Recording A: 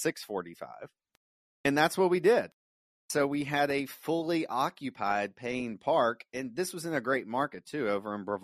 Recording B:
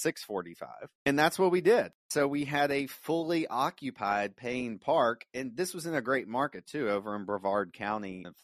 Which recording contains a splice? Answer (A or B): B